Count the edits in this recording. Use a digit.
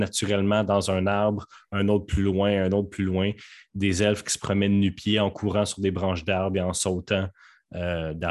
0